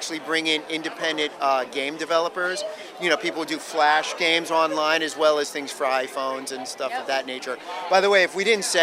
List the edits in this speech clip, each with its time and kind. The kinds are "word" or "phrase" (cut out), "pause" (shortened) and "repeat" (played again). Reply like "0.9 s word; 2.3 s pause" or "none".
none